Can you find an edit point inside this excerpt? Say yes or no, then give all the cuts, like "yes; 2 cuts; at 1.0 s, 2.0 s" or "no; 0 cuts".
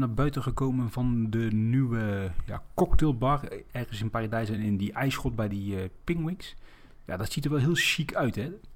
no; 0 cuts